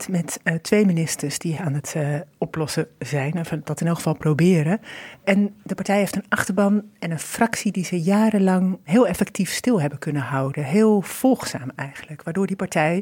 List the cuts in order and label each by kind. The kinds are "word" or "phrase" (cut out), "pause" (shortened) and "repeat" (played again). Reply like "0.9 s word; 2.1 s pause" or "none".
1.6 s phrase

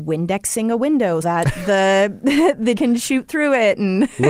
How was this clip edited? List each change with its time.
1.2 s word; 2.8 s word

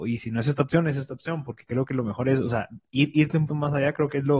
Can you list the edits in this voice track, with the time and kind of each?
3.5 s word

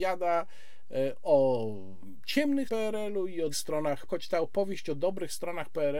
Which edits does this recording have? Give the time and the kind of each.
2.7 s word; 3.5 s word; 4.1 s word

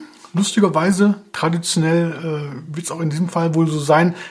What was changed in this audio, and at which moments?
none

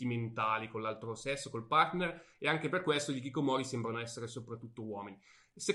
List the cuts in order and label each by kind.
none

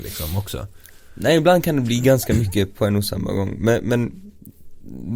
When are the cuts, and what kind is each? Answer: none

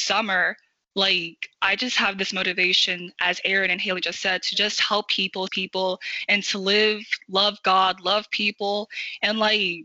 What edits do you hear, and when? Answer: 5.5 s phrase

